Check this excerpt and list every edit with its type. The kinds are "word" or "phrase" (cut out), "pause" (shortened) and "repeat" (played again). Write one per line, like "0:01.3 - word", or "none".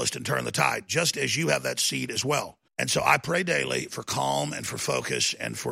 0:02.7 - pause